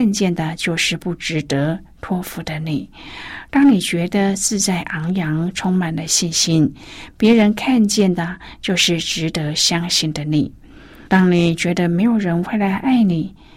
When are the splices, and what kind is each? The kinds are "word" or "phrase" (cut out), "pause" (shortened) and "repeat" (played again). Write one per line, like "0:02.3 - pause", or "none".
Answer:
0:11.1 - pause